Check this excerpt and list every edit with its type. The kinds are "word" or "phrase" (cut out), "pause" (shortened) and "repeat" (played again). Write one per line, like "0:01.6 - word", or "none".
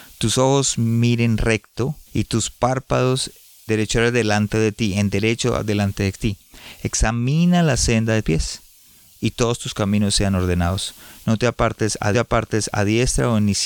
0:02.1 - pause
0:03.7 - phrase
0:08.2 - word
0:12.1 - repeat

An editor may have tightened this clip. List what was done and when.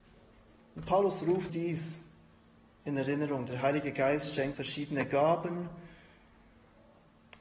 0:01.5 - word
0:04.5 - word

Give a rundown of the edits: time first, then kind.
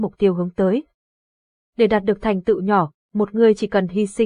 none

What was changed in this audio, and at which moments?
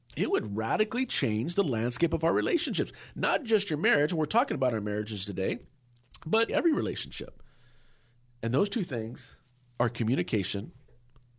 0:06.5 - word

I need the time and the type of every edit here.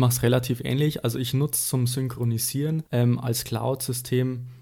0:02.9 - pause

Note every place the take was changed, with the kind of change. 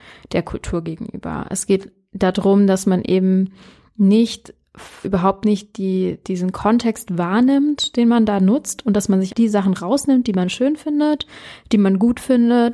0:05.0 - word
0:09.3 - word

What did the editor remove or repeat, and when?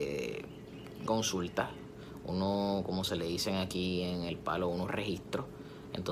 0:01.1 - word

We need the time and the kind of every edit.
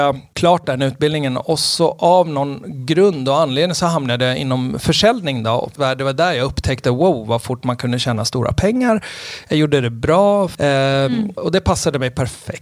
0:05.8 - phrase

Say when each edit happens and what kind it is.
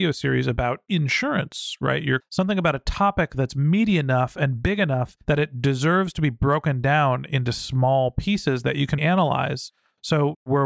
0:02.2 - word
0:05.2 - pause
0:09.0 - word

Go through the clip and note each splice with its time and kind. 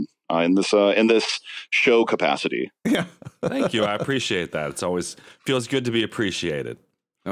none

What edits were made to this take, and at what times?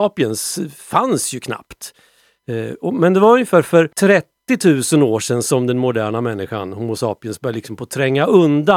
0:03.9 - pause

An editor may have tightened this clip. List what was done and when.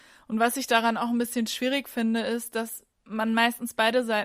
0:02.9 - pause

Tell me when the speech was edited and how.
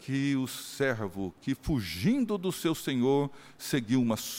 none

